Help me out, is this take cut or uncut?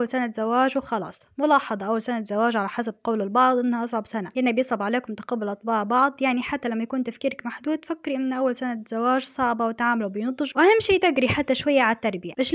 uncut